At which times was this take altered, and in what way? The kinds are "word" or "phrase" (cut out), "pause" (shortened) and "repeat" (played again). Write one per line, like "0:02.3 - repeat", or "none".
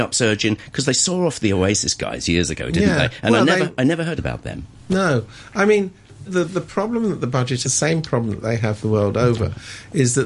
0:04.2 - phrase
0:06.3 - word
0:07.6 - phrase